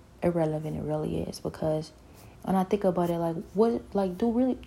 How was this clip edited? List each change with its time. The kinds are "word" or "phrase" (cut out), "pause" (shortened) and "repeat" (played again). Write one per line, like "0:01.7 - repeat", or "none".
0:02.3 - pause